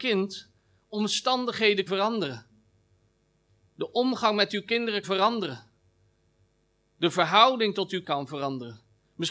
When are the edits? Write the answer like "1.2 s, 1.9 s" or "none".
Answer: 1.9 s, 5.0 s, 8.0 s